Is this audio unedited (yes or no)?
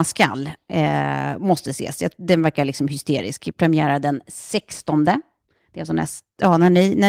yes